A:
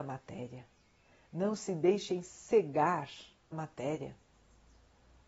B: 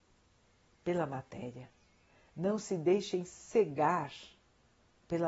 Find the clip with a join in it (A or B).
A